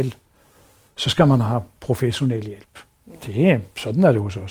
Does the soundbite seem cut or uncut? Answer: uncut